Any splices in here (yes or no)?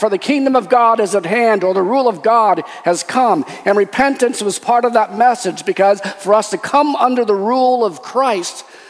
no